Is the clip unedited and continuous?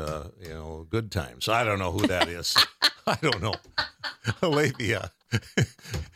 no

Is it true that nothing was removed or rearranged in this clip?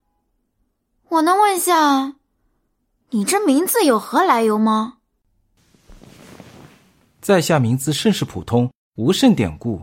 yes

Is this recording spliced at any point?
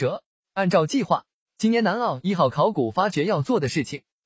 no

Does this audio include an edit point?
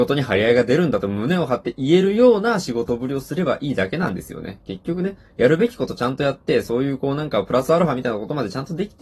yes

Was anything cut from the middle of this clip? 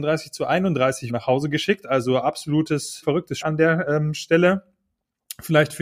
yes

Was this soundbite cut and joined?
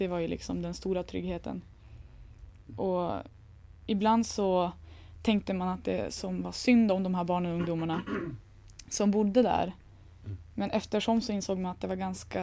no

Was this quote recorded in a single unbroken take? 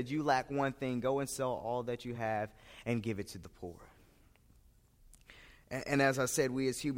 yes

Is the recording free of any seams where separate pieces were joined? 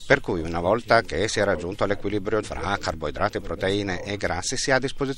no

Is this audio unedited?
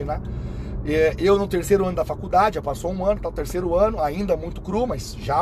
yes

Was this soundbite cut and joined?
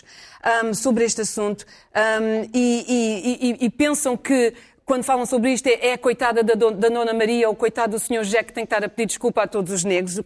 no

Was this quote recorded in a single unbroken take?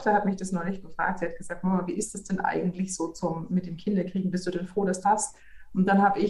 no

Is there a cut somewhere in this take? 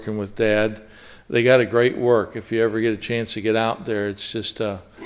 no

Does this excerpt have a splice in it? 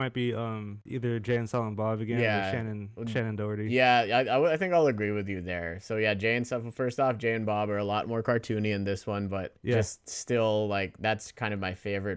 no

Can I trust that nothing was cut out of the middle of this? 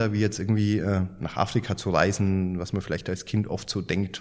yes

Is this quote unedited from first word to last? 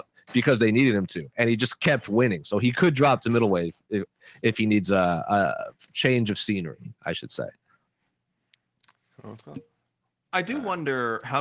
yes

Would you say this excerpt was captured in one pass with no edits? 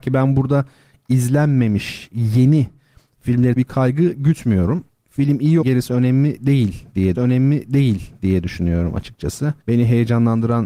no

